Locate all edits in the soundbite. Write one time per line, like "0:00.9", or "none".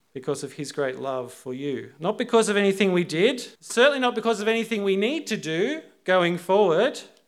0:03.6